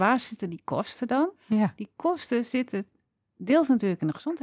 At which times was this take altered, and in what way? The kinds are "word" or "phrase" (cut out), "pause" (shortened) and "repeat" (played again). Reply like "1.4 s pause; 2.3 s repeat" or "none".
1.4 s pause

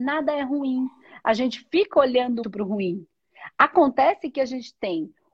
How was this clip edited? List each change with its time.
2.4 s word

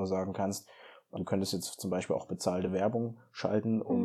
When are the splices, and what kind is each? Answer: none

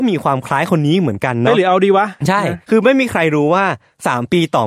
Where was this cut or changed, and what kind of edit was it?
2.2 s pause; 2.6 s pause

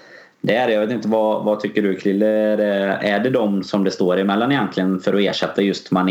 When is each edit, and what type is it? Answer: none

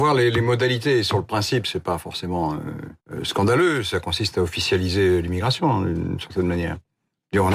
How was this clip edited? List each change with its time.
3.0 s pause

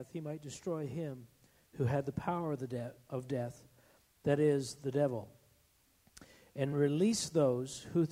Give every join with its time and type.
none

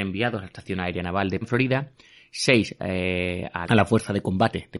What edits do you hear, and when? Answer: 1.4 s word; 3.6 s word

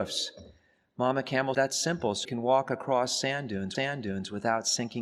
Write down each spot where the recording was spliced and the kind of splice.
1.5 s word; 2.2 s word; 3.7 s repeat

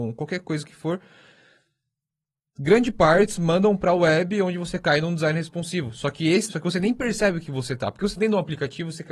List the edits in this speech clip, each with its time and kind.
6.5 s word; 8.2 s word

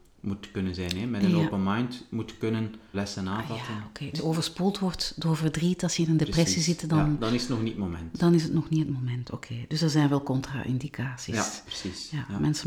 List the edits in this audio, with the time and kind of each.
2.9 s word; 4.2 s word

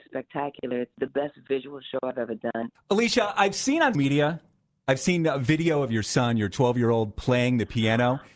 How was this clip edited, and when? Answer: 0.9 s word; 3.9 s word

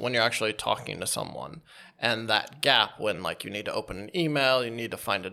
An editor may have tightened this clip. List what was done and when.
none

